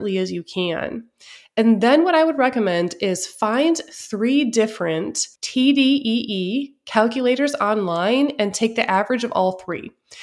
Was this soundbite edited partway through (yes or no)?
yes